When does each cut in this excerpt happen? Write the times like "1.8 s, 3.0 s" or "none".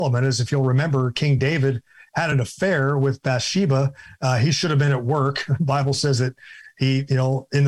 none

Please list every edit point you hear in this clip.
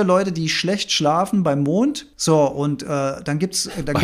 2.1 s

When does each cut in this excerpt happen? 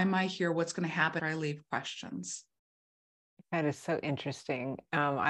1.2 s

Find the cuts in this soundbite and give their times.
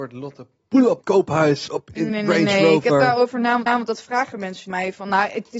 1.0 s, 1.7 s, 2.1 s, 3.7 s, 4.7 s

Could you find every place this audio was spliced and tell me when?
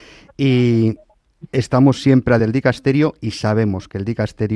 2.4 s

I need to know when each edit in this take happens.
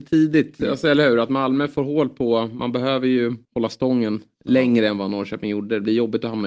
3.4 s

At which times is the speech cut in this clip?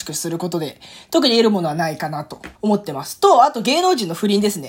2.6 s

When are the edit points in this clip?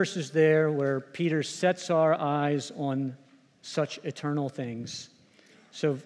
none

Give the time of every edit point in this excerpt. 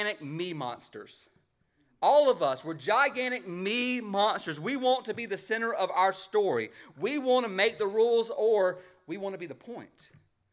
none

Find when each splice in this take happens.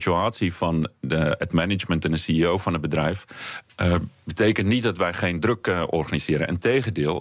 none

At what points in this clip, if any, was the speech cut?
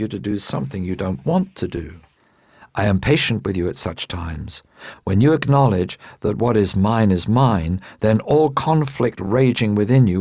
2.1 s

